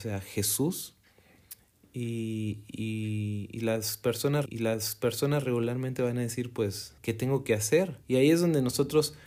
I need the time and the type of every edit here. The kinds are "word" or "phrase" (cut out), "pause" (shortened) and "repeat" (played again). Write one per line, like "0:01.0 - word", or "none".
0:04.5 - repeat
0:07.0 - pause
0:08.0 - pause